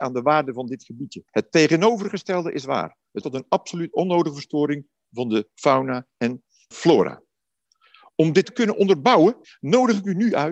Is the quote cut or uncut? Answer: cut